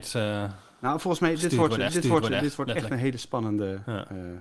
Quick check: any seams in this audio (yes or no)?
yes